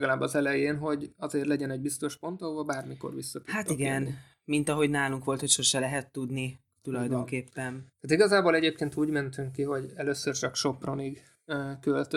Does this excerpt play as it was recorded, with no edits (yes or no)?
no